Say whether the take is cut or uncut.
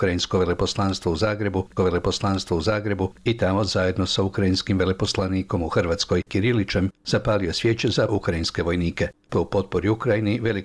cut